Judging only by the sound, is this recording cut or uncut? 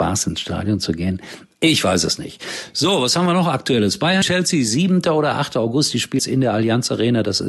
cut